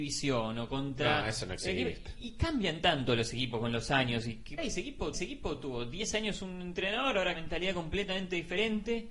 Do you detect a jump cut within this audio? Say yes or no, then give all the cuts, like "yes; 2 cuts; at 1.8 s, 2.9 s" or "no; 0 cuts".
yes; 3 cuts; at 4.6 s, 5.1 s, 7.3 s